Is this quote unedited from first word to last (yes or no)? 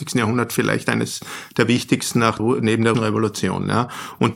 no